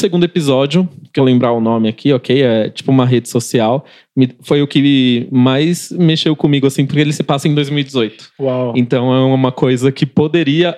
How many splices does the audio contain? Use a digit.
1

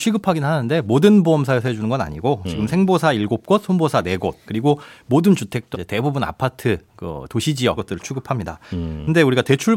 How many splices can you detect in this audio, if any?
3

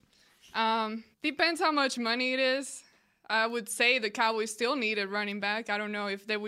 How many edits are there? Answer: 1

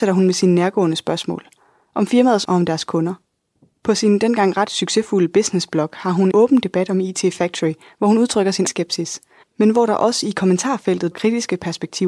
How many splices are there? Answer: 4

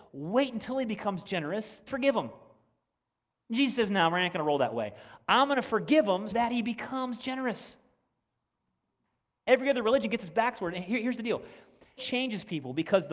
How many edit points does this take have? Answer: 3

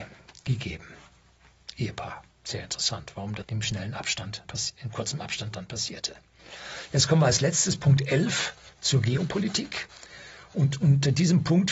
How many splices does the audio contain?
3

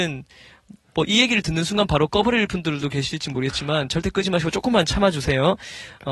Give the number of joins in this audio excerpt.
0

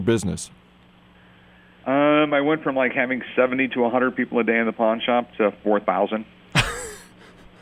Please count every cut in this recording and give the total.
0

